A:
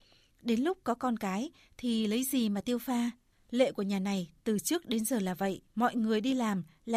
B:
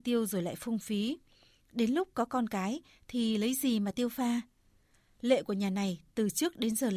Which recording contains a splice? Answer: A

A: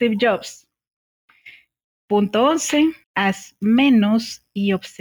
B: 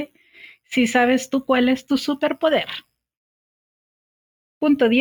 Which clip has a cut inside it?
A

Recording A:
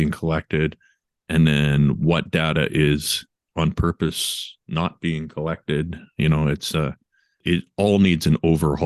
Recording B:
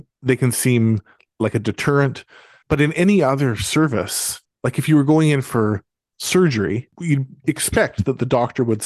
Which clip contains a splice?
B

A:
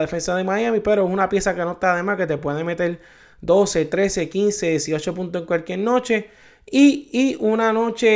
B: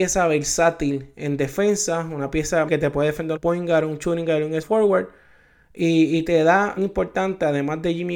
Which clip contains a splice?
B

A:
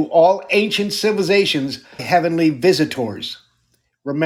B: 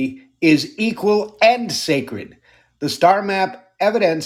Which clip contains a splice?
A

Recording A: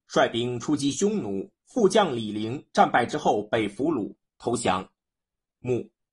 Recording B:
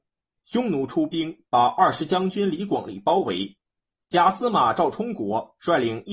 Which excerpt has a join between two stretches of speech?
A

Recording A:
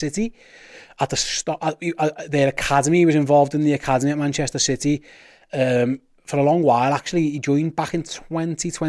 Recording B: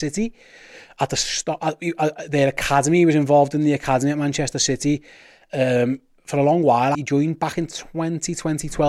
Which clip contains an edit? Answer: B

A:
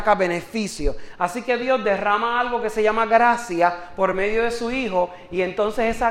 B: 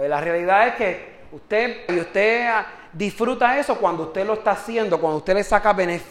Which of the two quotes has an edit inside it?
B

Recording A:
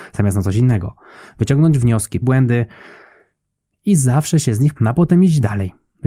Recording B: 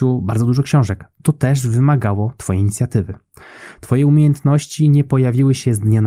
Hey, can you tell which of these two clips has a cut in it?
A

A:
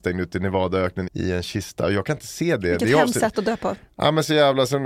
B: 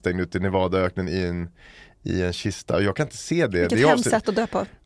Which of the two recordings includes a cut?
A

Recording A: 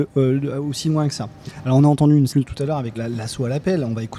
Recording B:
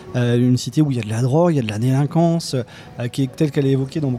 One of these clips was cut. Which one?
A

